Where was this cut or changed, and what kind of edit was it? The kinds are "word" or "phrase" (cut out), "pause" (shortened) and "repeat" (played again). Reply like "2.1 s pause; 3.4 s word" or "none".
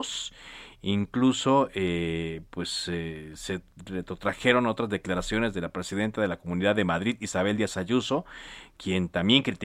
none